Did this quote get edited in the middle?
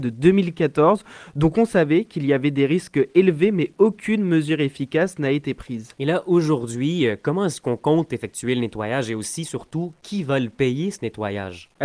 no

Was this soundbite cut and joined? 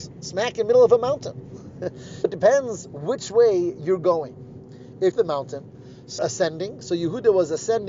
yes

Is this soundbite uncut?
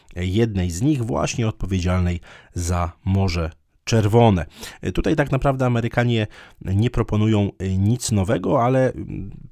yes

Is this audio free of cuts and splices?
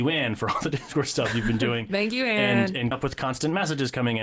no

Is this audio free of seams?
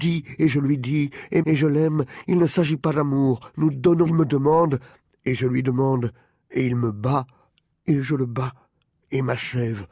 no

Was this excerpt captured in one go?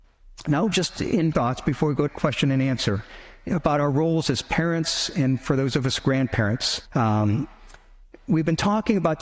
no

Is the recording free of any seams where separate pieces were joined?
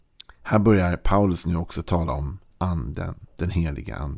yes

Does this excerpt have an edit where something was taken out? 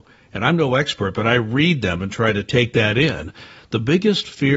no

